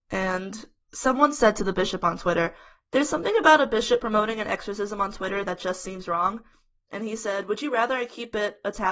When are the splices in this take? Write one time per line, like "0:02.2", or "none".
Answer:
none